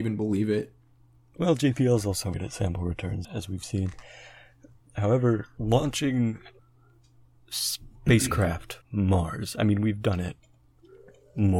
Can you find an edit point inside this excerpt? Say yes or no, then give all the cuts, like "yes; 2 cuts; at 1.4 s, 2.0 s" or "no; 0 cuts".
yes; 5 cuts; at 2.3 s, 3.2 s, 5.6 s, 6.6 s, 8.8 s